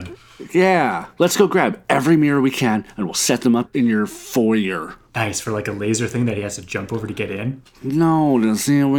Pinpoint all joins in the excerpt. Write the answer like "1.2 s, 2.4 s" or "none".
none